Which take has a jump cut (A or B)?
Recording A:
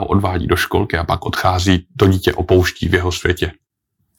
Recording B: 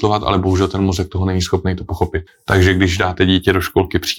B